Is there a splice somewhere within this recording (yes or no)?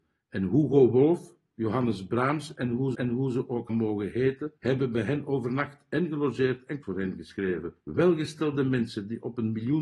yes